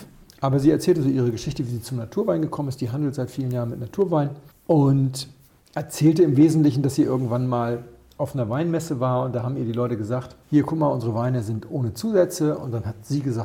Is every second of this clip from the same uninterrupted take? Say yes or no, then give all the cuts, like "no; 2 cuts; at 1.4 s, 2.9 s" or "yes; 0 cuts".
no; 2 cuts; at 4.5 s, 10.4 s